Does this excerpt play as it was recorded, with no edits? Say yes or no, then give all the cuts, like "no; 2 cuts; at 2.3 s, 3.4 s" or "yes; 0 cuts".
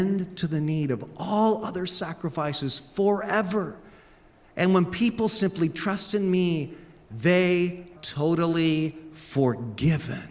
no; 1 cut; at 8.0 s